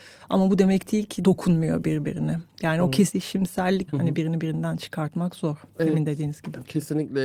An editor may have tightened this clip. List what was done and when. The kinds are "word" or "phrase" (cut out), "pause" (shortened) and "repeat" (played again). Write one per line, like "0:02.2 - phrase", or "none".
0:01.2 - word
0:03.9 - word